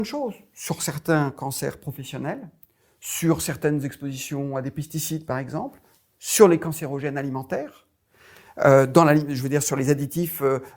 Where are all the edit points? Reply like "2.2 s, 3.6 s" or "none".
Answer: none

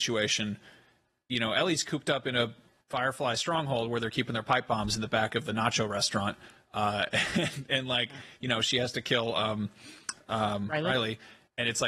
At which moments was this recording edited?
none

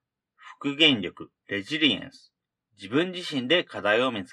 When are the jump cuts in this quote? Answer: 1.4 s, 2.6 s

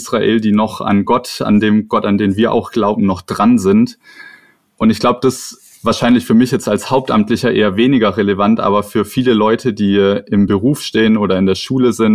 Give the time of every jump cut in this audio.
none

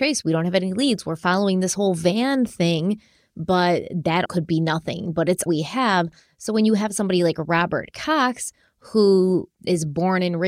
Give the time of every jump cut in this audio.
4.3 s, 5.5 s

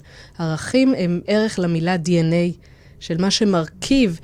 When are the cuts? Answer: 1.2 s

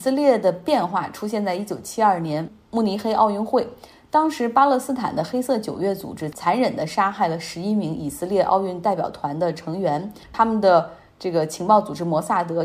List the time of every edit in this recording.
10.2 s

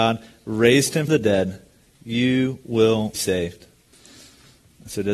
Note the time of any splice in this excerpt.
1.1 s, 3.1 s

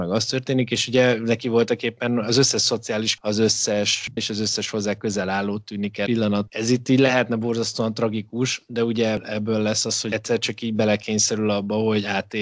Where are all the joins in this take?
3.2 s, 4.2 s, 6.1 s, 6.5 s, 10.1 s

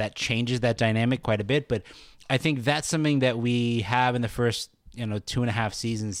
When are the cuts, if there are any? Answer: none

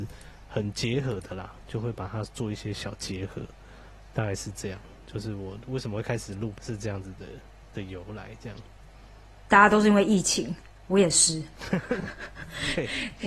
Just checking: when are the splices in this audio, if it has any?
6.6 s

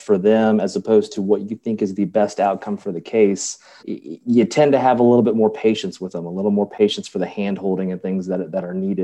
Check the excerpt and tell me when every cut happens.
3.8 s

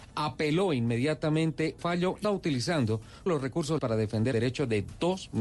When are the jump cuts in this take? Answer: 1.8 s, 2.2 s, 3.3 s, 3.8 s, 4.3 s

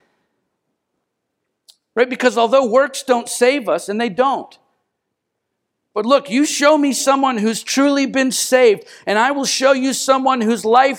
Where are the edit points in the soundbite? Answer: none

